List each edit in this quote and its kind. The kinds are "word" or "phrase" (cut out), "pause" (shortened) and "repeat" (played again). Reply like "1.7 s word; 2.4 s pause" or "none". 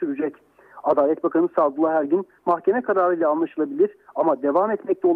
2.4 s phrase

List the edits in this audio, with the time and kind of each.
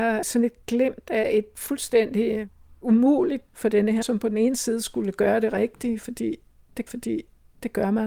3.5 s word; 4.0 s word; 6.9 s repeat

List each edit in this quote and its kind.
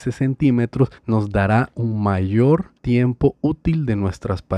1.0 s pause; 2.8 s pause

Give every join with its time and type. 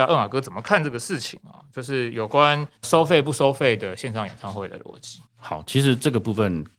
2.8 s pause; 5.3 s pause

